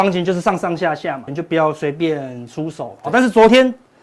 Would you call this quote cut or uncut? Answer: cut